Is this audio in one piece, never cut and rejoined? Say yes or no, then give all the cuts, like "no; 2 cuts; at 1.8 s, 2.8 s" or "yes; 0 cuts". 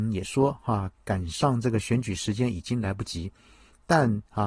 yes; 0 cuts